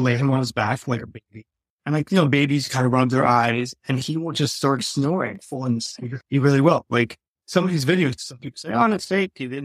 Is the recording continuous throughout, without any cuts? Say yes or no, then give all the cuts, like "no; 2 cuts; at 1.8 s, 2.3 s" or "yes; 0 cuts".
yes; 0 cuts